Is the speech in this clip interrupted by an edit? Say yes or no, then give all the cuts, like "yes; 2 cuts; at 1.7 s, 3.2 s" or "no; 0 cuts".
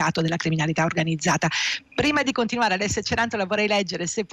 no; 0 cuts